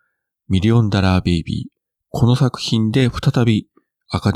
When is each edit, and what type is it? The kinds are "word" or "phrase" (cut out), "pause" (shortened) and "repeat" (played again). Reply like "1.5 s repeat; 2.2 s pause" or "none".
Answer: 1.9 s pause